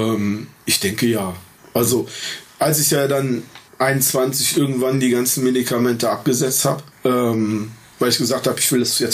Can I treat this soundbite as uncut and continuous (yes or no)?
no